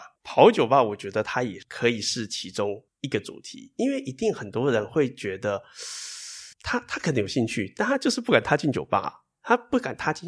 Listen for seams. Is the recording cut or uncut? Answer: cut